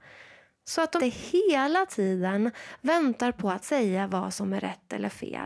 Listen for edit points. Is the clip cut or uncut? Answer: cut